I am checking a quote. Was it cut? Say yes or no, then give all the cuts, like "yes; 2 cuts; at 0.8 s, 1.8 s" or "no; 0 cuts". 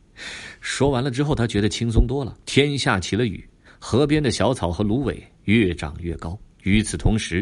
yes; 4 cuts; at 2.4 s, 3.7 s, 5.3 s, 6.5 s